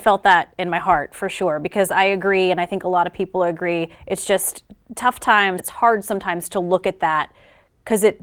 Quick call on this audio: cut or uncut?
cut